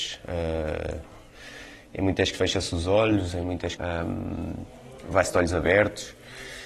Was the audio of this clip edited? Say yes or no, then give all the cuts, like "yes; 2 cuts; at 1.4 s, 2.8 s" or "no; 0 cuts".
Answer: yes; 2 cuts; at 2.3 s, 3.8 s